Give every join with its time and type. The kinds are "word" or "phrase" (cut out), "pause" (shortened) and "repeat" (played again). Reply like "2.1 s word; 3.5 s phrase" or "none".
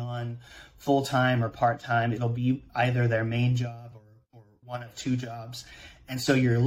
none